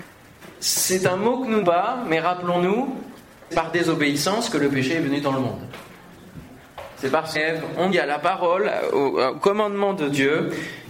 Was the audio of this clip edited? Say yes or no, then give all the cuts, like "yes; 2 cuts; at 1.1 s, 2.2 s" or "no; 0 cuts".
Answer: yes; 4 cuts; at 1.6 s, 3.5 s, 7.3 s, 7.9 s